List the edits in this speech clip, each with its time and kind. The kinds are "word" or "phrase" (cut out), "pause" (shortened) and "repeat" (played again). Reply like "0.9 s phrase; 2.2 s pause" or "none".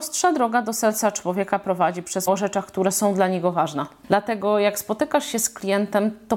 2.3 s word